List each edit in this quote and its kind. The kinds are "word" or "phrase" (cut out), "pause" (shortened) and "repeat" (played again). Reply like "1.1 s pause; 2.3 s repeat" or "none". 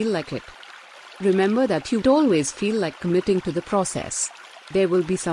2.0 s word